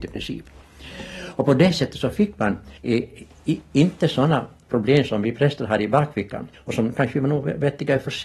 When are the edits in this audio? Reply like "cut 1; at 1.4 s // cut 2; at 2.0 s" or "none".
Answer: cut 1; at 2.8 s // cut 2; at 6.5 s